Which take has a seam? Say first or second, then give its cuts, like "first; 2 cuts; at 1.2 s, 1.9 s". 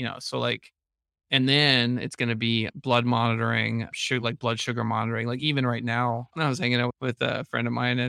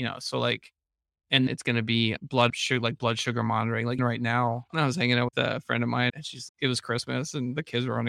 second; 6 cuts; at 1.5 s, 2.5 s, 4.0 s, 5.3 s, 6.1 s, 6.5 s